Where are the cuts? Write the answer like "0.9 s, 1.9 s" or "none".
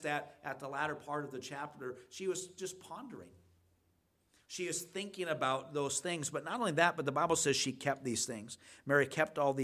none

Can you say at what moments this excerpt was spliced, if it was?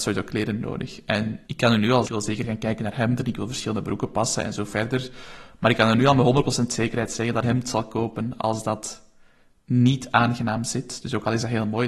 1.4 s, 2.0 s, 7.4 s

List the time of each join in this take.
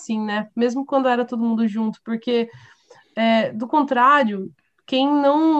none

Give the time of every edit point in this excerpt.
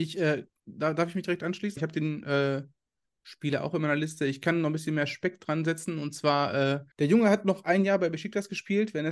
1.8 s, 6.9 s

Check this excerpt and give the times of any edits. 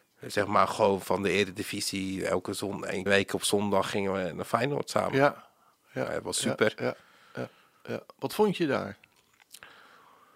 3.1 s

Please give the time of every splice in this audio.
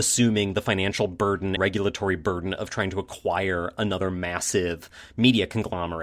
1.6 s

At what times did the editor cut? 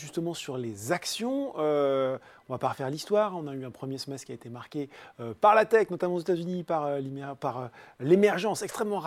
none

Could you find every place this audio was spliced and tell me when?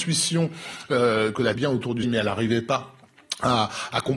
1.5 s, 2.0 s

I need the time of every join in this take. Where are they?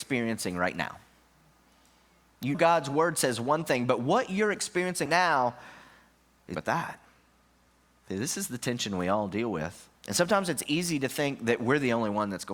2.5 s, 5.1 s, 6.5 s, 10.0 s

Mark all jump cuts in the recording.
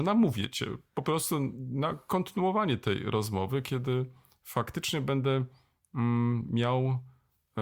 none

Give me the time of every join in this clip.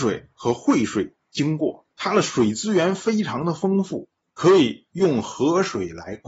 1.9 s, 4.2 s

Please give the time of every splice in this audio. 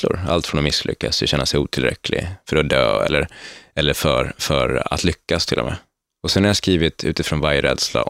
none

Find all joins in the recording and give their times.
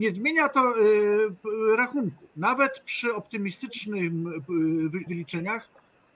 2.3 s, 5.1 s

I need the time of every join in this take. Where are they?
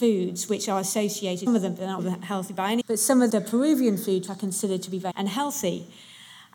1.5 s, 2.0 s, 2.8 s, 3.3 s, 4.3 s, 5.1 s

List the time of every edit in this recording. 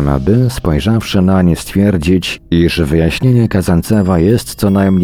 none

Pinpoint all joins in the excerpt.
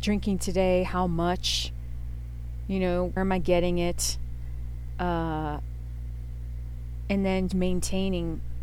3.2 s, 7.5 s

